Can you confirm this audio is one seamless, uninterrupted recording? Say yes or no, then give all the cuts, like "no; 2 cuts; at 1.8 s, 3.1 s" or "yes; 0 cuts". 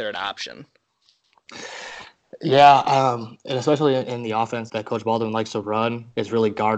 no; 1 cut; at 4.7 s